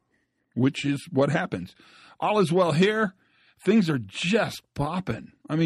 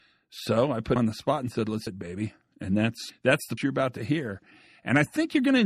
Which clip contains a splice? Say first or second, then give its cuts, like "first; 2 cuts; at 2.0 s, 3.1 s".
second; 4 cuts; at 1.0 s, 1.9 s, 3.1 s, 3.6 s